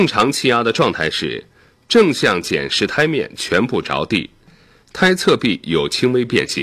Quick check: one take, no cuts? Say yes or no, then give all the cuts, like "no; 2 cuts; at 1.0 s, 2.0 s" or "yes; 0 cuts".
yes; 0 cuts